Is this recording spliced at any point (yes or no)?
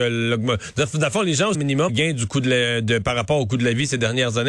yes